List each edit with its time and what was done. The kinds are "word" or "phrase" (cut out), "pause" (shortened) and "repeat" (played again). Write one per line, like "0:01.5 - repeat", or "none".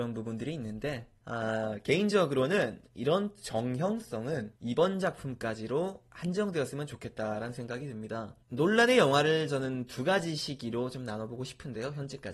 0:04.5 - pause
0:08.4 - pause